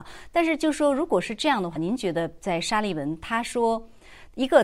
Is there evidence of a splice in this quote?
yes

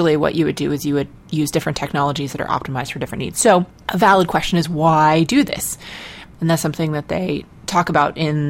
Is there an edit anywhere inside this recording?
yes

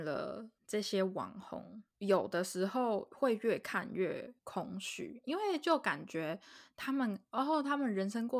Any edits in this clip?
yes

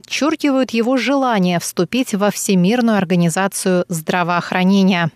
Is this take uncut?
yes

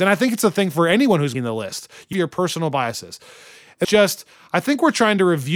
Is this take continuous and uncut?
no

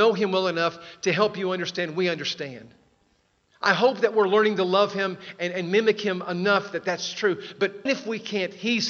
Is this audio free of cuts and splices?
no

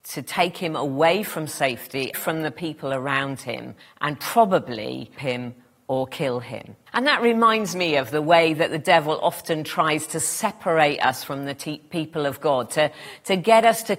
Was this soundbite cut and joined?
yes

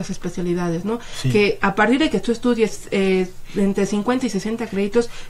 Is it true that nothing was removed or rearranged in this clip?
yes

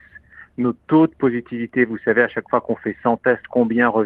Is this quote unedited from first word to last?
yes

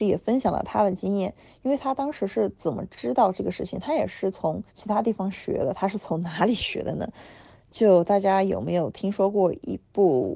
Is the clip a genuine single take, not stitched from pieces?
no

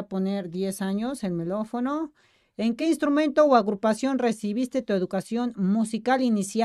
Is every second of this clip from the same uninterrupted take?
yes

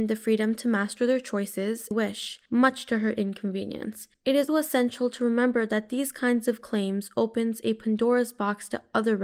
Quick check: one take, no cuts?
no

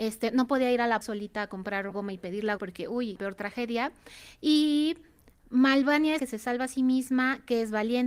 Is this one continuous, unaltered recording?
no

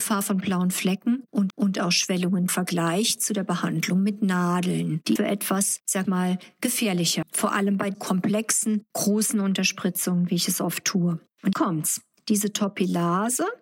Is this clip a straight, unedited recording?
no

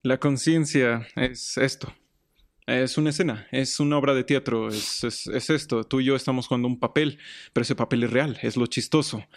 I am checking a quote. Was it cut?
yes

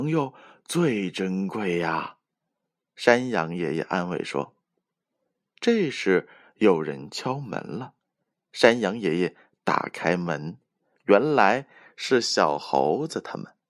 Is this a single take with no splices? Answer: yes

